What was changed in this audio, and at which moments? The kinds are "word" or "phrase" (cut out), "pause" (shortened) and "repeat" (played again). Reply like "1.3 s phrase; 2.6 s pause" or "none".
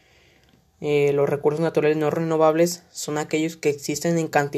none